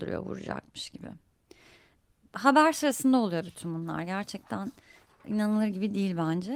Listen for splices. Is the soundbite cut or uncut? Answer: uncut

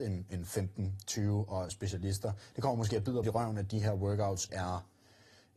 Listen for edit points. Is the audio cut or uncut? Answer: cut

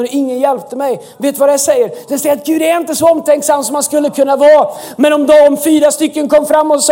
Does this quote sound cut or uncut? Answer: uncut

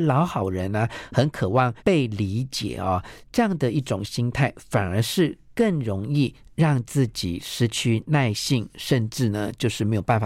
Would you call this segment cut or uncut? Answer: cut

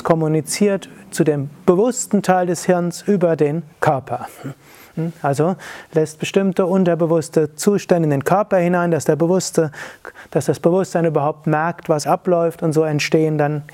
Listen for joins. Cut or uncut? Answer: cut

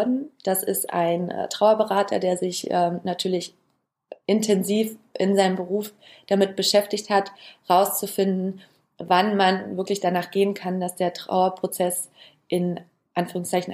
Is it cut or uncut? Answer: uncut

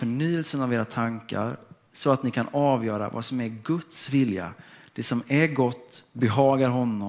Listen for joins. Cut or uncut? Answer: uncut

